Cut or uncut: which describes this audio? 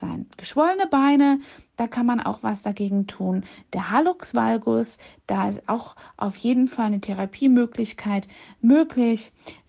uncut